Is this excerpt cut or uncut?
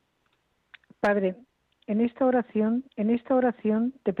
cut